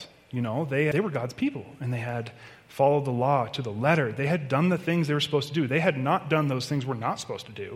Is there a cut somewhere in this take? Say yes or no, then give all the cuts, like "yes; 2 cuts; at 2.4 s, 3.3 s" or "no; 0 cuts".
yes; 1 cut; at 0.9 s